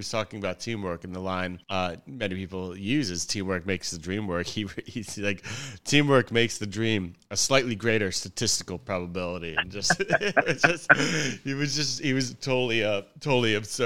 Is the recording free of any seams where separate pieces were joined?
no; 1 cut; at 1.6 s

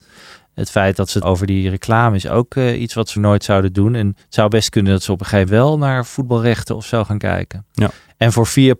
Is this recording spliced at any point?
yes; 4 cuts; at 1.2 s, 3.2 s, 4.2 s, 5.5 s

